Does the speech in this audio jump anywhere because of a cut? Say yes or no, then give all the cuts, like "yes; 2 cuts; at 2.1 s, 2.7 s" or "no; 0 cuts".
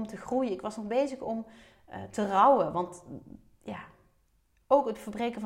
no; 0 cuts